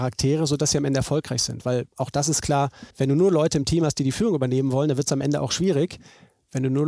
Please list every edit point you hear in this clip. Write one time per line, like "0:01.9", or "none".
0:02.9